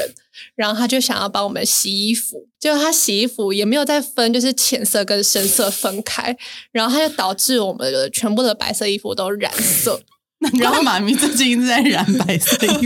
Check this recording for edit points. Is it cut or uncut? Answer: cut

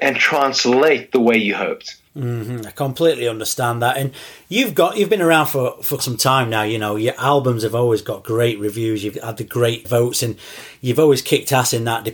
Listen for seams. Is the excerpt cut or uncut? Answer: cut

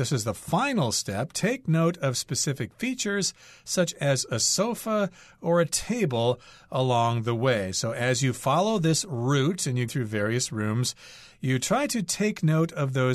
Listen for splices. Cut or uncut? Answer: cut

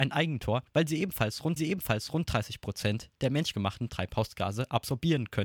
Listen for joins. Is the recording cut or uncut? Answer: cut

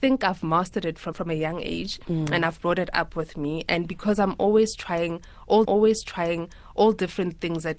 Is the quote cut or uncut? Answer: cut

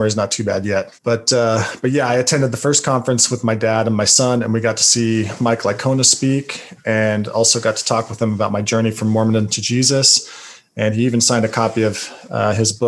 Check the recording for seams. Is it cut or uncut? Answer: cut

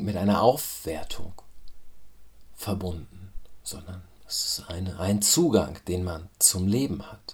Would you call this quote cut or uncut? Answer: uncut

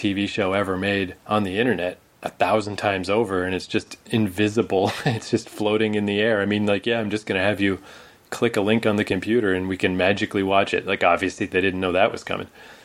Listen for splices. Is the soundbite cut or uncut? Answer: cut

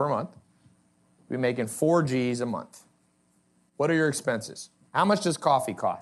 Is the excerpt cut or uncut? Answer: uncut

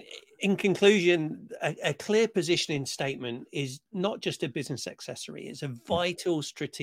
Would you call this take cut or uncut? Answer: uncut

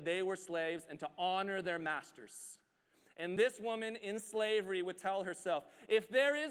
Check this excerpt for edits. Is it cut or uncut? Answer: uncut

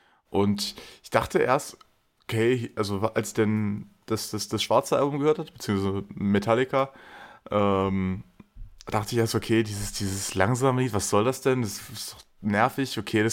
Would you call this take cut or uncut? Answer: uncut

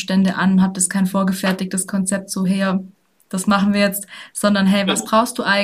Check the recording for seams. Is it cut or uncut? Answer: uncut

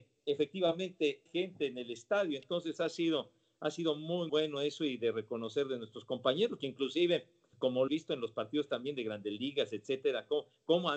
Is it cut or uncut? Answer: cut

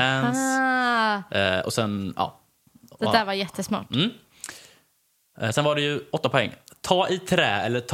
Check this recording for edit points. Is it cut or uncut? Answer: uncut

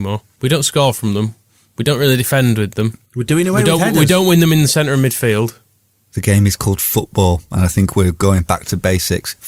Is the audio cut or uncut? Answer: uncut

